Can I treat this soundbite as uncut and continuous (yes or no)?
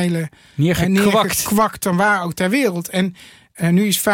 yes